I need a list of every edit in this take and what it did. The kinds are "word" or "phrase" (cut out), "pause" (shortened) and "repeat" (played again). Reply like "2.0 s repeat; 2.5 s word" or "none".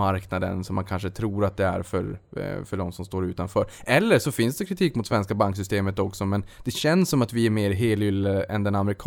none

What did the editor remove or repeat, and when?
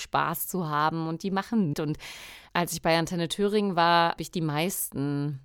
1.7 s word; 2.5 s word; 4.2 s word

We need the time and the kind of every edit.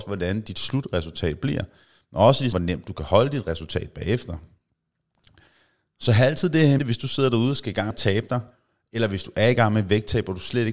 2.5 s word; 6.8 s word; 7.9 s word

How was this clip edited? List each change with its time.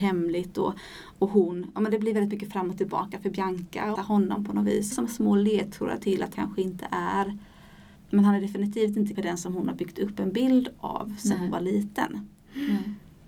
4.0 s phrase; 4.9 s phrase; 6.3 s word; 8.0 s word; 9.1 s word

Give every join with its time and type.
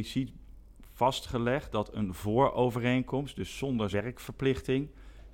3.9 s word

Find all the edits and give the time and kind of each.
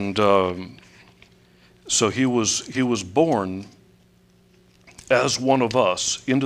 none

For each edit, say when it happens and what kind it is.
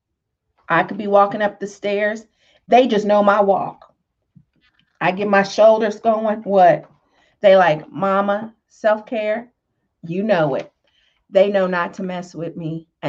none

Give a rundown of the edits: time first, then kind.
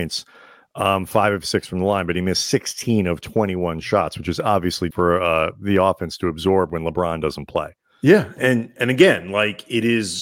4.9 s word

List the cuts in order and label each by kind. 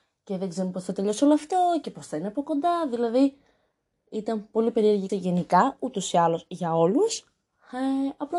5.1 s word

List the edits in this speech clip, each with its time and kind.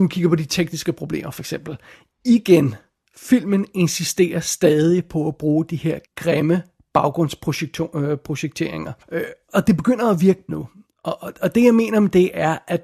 6.1 s pause; 9.0 s pause; 9.5 s word; 10.5 s word

